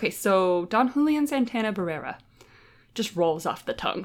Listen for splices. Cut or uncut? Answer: uncut